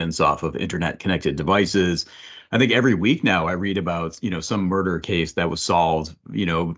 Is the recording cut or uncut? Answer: uncut